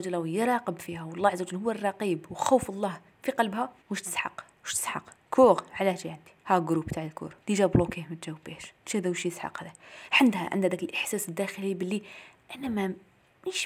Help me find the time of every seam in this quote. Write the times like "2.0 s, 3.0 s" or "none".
3.8 s, 4.6 s, 6.4 s, 7.4 s, 8.8 s